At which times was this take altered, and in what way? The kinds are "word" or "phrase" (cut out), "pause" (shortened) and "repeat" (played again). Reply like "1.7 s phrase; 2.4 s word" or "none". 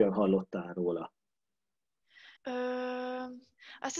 2.4 s pause